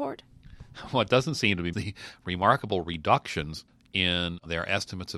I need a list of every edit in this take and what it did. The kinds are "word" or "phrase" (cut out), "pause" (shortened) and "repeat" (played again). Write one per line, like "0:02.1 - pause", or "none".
0:01.7 - phrase